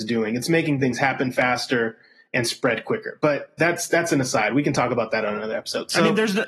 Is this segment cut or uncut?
uncut